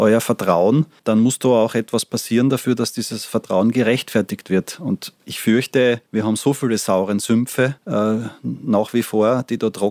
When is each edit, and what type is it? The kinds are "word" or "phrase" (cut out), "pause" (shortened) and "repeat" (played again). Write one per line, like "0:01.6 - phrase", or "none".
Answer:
0:01.0 - pause
0:05.2 - pause
0:06.1 - pause
0:07.8 - pause